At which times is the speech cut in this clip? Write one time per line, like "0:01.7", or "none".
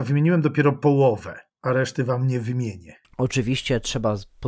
0:01.5